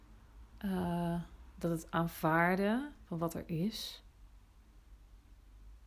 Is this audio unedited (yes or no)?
yes